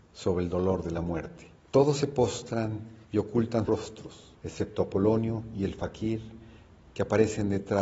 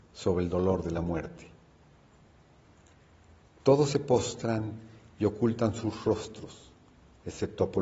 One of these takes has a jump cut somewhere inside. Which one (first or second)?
first